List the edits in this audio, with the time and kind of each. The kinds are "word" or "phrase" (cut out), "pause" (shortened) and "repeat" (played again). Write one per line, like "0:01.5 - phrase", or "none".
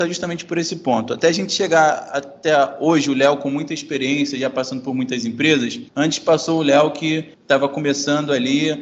0:05.9 - pause
0:07.3 - pause